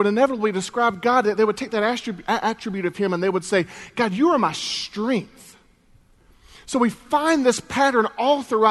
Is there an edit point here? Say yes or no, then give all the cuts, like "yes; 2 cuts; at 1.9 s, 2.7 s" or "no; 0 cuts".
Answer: no; 0 cuts